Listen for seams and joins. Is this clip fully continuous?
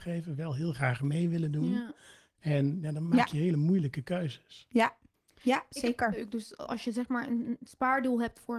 yes; 0 cuts

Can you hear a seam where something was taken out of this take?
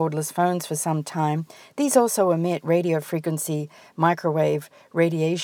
no; 0 cuts

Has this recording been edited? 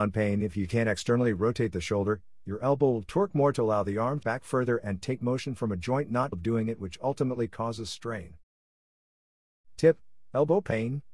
yes; 2 cuts; at 4.2 s, 6.3 s

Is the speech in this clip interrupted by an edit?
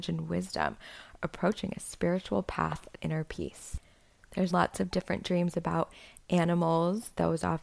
yes; 3 cuts; at 1.2 s, 3.0 s, 4.5 s

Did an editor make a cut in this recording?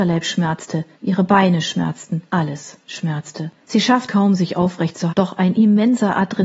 yes; 5 cuts; at 0.9 s, 2.3 s, 3.6 s, 4.1 s, 5.1 s

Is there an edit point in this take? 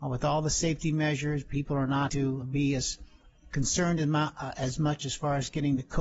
yes; 2 cuts; at 2.1 s, 2.4 s

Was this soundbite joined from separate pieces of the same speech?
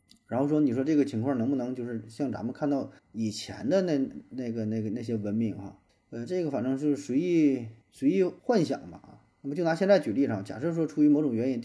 yes; 4 cuts; at 3.0 s, 5.9 s, 7.8 s, 8.4 s

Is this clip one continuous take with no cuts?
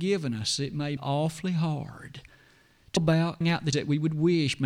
no; 4 cuts; at 1.0 s, 3.0 s, 3.4 s, 3.7 s

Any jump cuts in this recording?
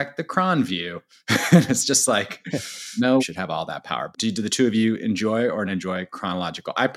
yes; 3 cuts; at 3.2 s, 4.1 s, 5.7 s

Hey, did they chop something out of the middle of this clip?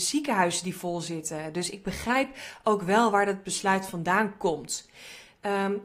no; 0 cuts

